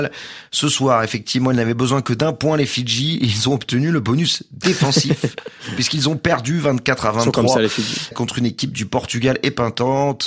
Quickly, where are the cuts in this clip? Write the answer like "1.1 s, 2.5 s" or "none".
8.1 s